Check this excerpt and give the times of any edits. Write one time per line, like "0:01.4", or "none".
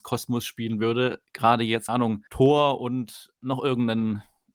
0:01.2
0:01.9
0:02.3
0:03.4